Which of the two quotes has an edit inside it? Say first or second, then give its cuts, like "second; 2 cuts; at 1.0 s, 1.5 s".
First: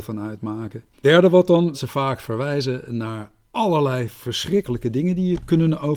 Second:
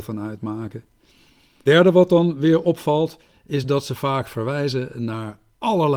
first; 2 cuts; at 0.9 s, 1.7 s